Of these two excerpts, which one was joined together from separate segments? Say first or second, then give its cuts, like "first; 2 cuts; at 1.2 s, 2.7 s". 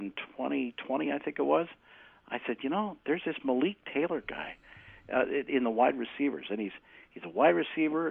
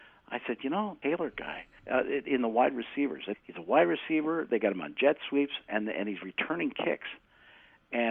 second; 3 cuts; at 1.0 s, 1.8 s, 3.3 s